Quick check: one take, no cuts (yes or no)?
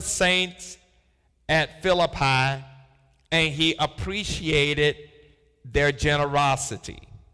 yes